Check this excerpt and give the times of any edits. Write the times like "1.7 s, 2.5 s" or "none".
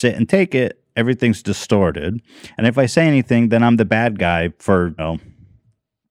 5.0 s